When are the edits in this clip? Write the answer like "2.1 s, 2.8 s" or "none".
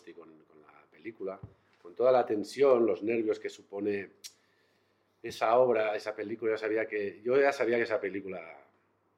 none

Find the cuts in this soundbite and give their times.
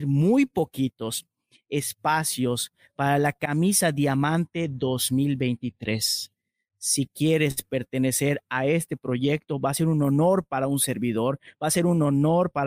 none

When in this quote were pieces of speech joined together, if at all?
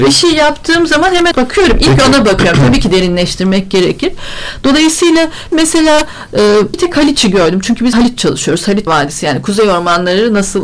1.3 s, 5.5 s, 6.7 s, 7.9 s, 8.9 s

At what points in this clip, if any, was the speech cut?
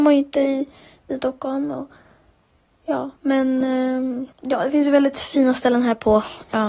3.2 s, 4.3 s

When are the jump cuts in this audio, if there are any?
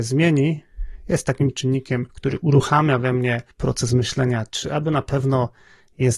2.1 s, 3.5 s

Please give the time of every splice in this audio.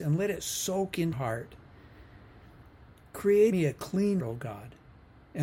1.1 s, 3.5 s, 4.2 s

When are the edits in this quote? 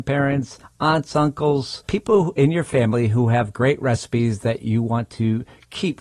none

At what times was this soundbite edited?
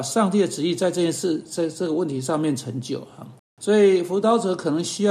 3.5 s

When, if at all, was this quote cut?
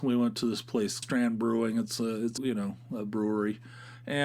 1.0 s, 2.4 s

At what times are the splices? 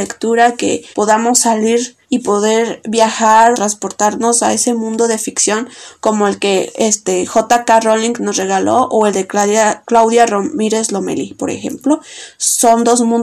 0.9 s, 2.0 s, 3.5 s

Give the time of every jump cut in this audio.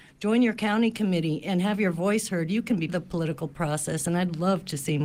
2.9 s

